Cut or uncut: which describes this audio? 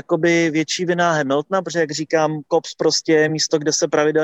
uncut